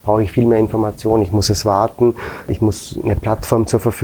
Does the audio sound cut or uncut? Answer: uncut